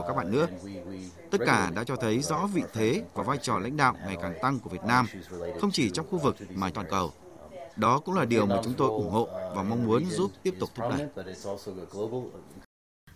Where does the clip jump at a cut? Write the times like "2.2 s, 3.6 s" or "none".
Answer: 6.7 s, 7.7 s

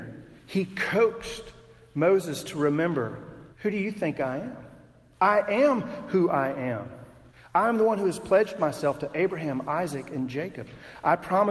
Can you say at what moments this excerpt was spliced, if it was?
3.5 s, 7.3 s

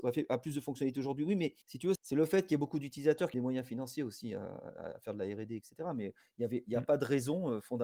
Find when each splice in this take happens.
1.6 s, 2.0 s, 3.3 s

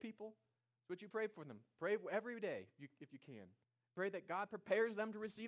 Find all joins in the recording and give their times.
3.6 s

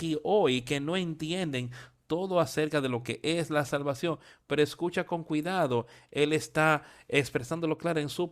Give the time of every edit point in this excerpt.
none

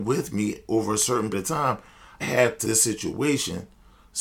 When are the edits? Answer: 1.3 s, 2.2 s, 2.6 s

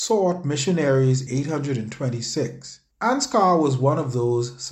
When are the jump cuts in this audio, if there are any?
1.3 s, 2.9 s

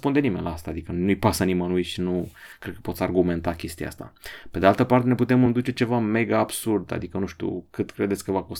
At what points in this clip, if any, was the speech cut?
none

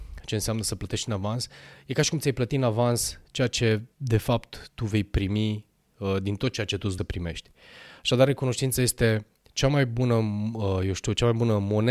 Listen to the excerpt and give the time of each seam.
3.9 s, 7.0 s

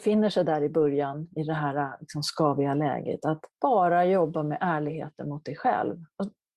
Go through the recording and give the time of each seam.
3.5 s

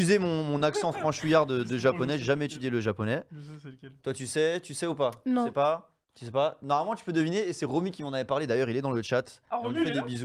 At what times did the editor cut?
6.0 s

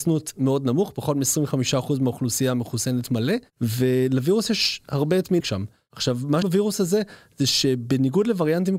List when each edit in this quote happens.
5.4 s, 6.4 s

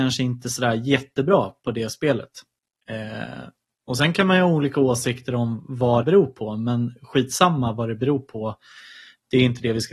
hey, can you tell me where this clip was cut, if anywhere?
6.0 s

